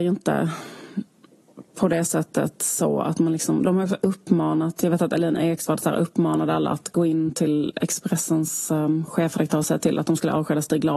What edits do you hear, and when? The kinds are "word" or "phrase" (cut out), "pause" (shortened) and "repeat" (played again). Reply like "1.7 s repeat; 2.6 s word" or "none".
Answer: none